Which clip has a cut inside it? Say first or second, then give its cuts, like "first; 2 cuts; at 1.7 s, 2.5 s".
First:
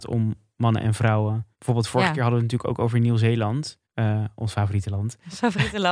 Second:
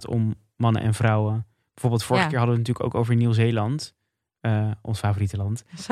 first; 2 cuts; at 1.5 s, 3.8 s